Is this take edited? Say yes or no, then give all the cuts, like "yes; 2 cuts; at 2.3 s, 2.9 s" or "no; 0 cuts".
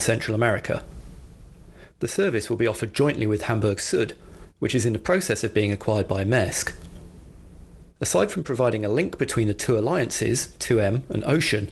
no; 0 cuts